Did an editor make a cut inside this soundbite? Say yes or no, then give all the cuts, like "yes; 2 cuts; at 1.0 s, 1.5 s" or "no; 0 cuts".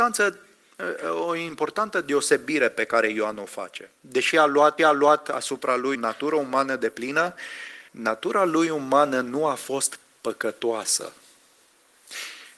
yes; 3 cuts; at 4.8 s, 5.9 s, 7.9 s